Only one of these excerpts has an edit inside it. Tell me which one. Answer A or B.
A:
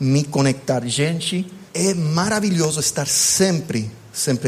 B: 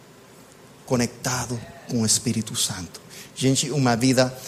A